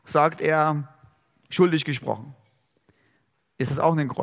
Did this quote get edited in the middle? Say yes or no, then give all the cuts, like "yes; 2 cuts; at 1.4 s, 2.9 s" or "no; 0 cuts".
no; 0 cuts